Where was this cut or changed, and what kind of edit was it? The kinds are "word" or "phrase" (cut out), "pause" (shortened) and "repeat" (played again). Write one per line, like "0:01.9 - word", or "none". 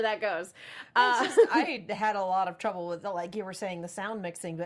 none